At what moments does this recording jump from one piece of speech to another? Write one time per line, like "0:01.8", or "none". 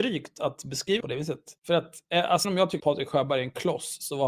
0:01.0
0:01.6
0:02.4
0:02.8